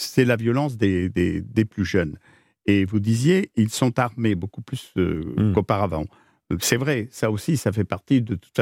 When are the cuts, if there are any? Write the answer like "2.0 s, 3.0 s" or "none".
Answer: none

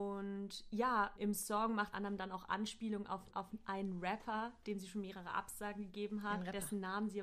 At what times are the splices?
1.2 s, 1.9 s, 3.3 s

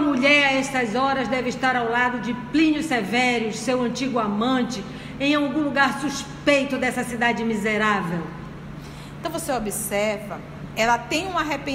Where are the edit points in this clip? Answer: 10.7 s

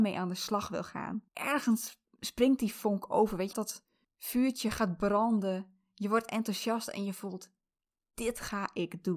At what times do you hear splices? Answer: 1.3 s, 3.5 s

